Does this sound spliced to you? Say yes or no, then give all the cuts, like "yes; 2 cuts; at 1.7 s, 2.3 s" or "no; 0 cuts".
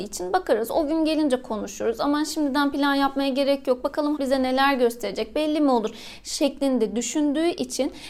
yes; 1 cut; at 4.2 s